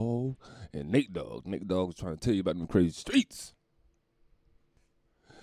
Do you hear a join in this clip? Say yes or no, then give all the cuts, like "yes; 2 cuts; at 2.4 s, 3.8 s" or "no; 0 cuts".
no; 0 cuts